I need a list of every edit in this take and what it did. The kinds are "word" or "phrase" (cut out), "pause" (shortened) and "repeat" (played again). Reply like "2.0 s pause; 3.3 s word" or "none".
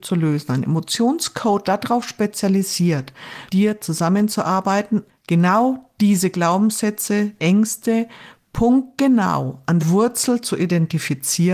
1.6 s word; 3.5 s word; 5.1 s word; 7.4 s word; 9.8 s word